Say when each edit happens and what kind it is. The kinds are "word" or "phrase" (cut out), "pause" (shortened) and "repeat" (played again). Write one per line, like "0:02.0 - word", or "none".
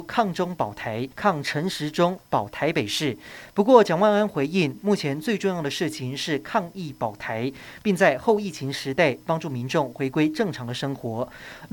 0:01.1 - pause